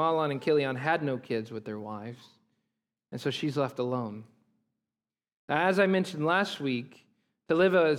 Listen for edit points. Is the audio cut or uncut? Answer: uncut